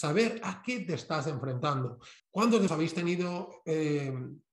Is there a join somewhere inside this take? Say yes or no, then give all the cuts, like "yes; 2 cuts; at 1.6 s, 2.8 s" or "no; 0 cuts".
yes; 2 cuts; at 2.2 s, 2.7 s